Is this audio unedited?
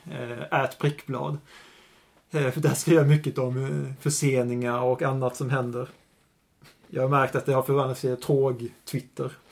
yes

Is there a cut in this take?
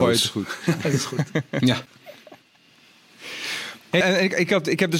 yes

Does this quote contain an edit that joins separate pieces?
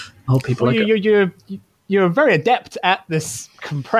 no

